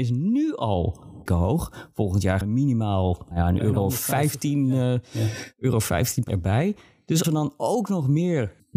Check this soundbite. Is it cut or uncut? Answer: cut